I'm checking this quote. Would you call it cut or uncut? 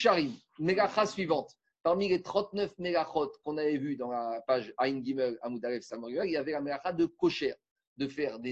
uncut